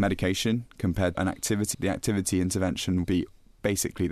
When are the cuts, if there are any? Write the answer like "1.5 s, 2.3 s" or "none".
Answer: 1.1 s, 1.7 s, 3.0 s